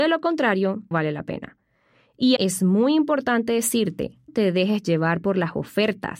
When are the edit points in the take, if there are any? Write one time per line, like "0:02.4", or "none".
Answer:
0:00.9
0:02.4
0:04.3